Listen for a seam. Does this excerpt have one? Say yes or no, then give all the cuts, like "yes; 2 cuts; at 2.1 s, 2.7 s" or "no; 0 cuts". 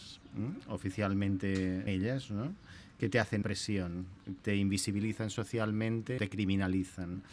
yes; 4 cuts; at 1.9 s, 3.4 s, 4.4 s, 6.2 s